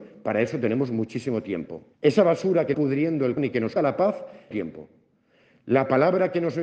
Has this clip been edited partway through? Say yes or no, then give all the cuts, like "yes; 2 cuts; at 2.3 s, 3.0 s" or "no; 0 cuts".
yes; 5 cuts; at 1.9 s, 2.7 s, 3.4 s, 3.8 s, 4.5 s